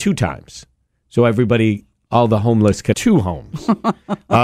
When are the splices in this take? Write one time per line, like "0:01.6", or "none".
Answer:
0:02.9